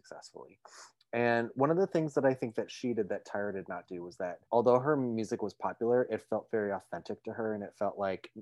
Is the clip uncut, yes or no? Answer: no